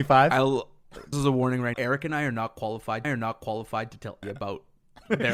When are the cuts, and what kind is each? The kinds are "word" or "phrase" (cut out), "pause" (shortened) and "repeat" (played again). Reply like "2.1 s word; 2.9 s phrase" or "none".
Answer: 1.1 s word; 1.7 s word; 3.0 s repeat; 4.2 s word

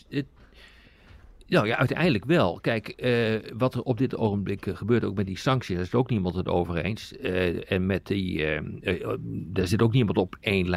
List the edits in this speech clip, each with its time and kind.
none

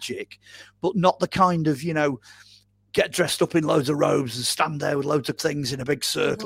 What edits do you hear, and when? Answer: 5.4 s word

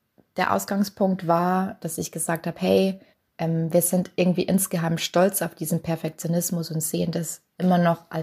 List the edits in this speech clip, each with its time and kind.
1.8 s word; 3.1 s pause

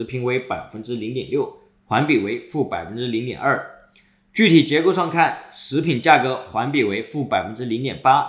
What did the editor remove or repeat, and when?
none

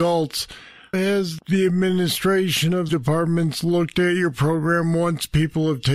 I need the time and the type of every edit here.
0.9 s word; 1.4 s word; 2.9 s word

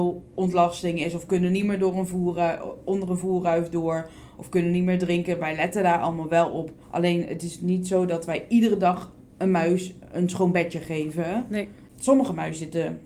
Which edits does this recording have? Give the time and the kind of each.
6.8 s pause; 11.9 s pause

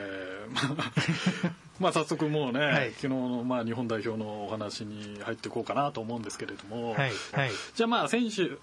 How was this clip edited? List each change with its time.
7.3 s repeat

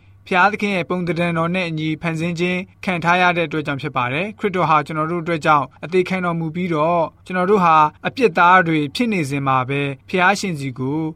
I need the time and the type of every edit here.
8.0 s pause; 10.0 s pause

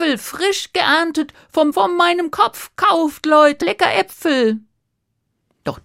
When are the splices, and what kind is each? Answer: 1.7 s word; 3.6 s word

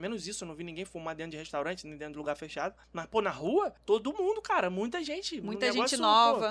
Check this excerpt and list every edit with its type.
2.8 s pause; 3.8 s pause

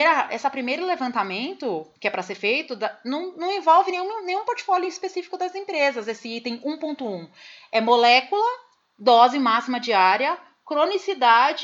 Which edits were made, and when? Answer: 1.9 s pause

